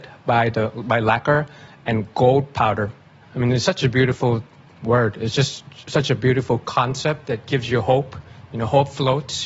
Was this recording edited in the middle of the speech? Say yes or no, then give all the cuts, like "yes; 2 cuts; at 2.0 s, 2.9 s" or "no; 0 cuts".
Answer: no; 0 cuts